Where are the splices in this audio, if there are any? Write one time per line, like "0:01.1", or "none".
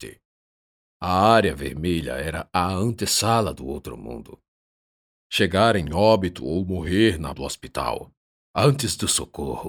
0:07.3